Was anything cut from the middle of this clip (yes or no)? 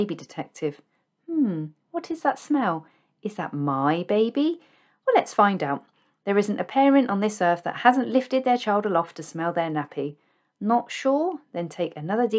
no